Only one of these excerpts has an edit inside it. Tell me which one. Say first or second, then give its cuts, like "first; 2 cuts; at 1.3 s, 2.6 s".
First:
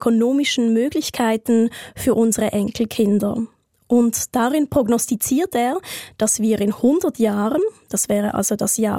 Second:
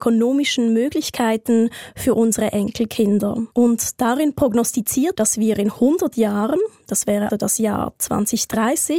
second; 3 cuts; at 3.5 s, 5.1 s, 7.3 s